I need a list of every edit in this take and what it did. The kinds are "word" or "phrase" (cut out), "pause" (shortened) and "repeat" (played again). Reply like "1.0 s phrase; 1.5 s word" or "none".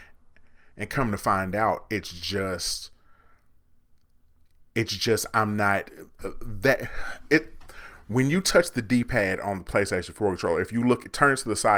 none